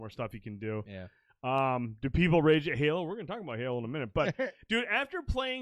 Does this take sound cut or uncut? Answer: uncut